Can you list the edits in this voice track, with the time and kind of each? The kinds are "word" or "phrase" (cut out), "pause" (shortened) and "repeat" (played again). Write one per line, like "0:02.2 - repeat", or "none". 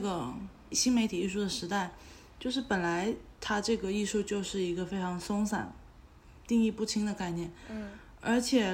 none